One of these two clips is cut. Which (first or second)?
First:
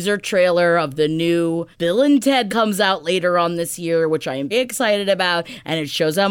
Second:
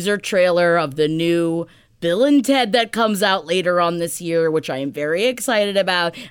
first